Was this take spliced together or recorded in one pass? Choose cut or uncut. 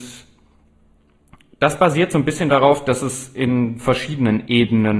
uncut